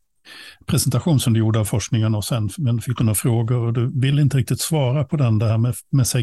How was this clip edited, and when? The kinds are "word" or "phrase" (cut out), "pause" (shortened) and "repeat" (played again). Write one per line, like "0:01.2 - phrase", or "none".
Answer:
none